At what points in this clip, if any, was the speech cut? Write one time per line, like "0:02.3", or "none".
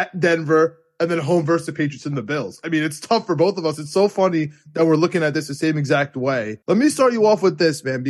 0:06.6